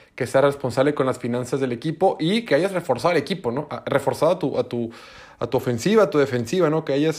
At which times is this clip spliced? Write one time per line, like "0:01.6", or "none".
none